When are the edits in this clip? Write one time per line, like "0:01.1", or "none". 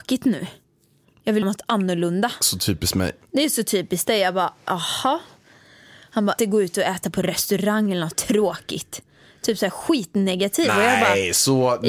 0:01.4
0:06.4

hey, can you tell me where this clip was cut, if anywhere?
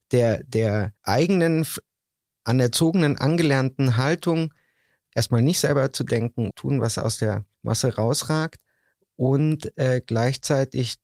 0:01.0
0:06.5
0:07.5

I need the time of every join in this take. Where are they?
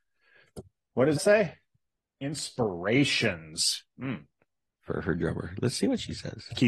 0:01.2

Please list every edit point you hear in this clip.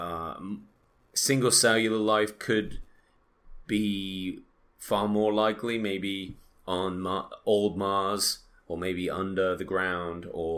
none

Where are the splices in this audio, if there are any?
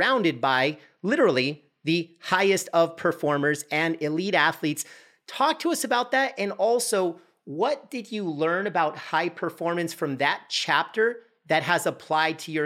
none

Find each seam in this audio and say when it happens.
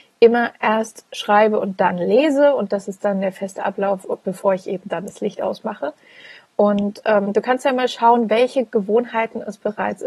none

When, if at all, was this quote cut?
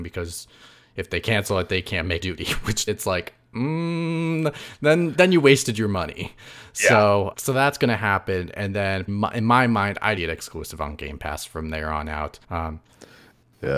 0:02.2
0:02.9
0:05.1
0:07.3
0:09.1
0:10.2
0:12.4

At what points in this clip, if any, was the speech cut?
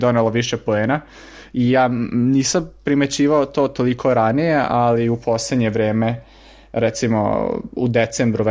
none

